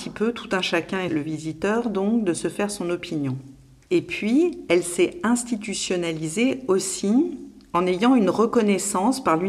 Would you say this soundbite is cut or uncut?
uncut